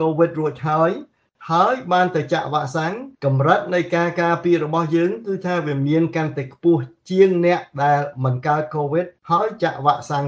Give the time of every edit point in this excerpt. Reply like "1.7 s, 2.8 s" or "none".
3.1 s, 9.2 s